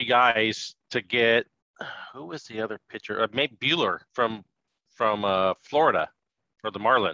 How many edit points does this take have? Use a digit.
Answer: 1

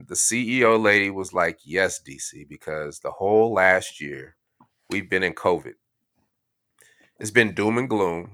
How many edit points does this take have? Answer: 0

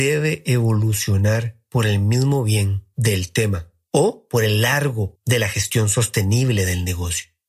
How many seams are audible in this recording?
1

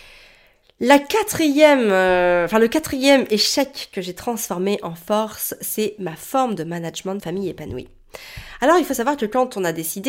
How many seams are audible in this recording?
1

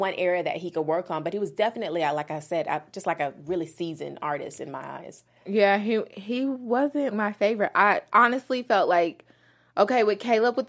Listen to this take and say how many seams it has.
1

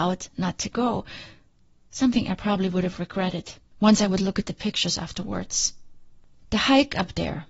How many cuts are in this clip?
0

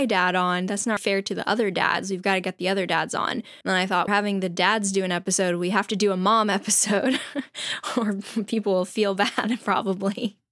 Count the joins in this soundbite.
3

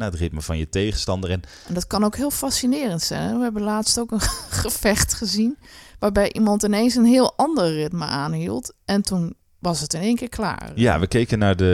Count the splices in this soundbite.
0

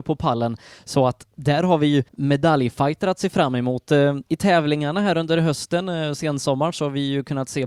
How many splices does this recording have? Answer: 2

